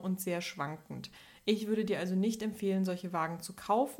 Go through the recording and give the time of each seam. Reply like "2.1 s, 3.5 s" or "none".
none